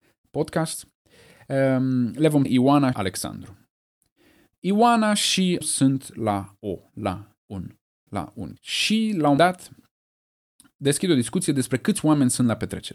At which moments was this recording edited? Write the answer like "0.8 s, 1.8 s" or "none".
2.4 s, 2.9 s, 5.6 s, 6.9 s, 8.1 s, 8.6 s, 9.4 s